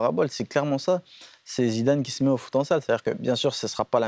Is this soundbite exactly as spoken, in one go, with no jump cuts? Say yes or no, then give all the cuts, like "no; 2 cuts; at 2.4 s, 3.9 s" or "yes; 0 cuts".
yes; 0 cuts